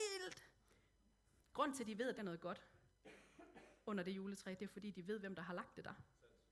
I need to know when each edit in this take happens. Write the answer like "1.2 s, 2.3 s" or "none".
2.2 s